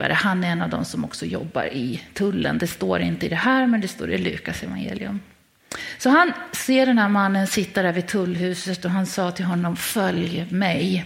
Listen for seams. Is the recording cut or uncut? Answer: uncut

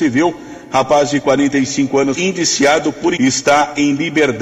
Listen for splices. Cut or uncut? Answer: cut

